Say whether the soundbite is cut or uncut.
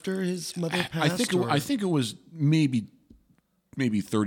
uncut